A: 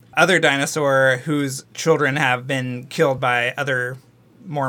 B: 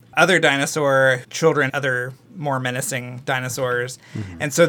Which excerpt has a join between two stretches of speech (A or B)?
B